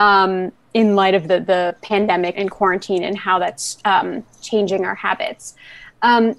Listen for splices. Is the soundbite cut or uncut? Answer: cut